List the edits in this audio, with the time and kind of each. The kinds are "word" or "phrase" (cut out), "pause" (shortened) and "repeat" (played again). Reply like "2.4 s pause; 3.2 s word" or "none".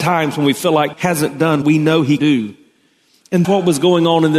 0.9 s word; 1.6 s word; 2.2 s word; 3.4 s word